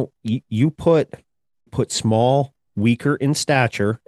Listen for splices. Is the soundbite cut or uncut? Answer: cut